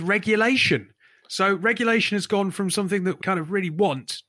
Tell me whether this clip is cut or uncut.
cut